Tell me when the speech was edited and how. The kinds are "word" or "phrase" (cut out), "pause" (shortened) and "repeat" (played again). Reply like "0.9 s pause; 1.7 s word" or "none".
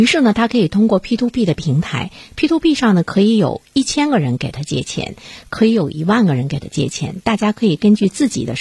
none